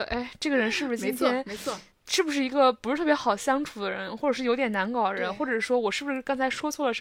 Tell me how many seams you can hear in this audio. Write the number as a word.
one